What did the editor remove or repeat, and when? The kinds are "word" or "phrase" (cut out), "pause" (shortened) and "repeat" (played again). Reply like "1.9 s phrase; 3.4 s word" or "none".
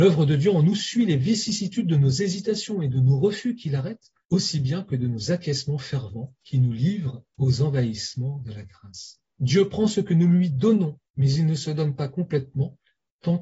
4.2 s pause; 6.4 s pause; 7.3 s pause; 9.3 s pause; 11.1 s pause